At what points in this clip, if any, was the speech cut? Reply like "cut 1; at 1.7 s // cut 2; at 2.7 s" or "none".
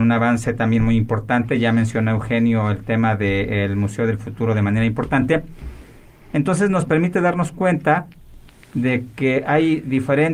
none